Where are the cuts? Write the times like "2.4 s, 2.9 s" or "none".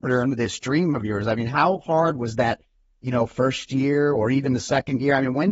none